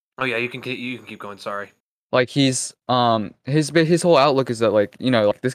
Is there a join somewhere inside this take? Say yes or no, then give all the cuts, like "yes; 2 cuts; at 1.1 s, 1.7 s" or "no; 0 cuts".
yes; 2 cuts; at 1.8 s, 2.8 s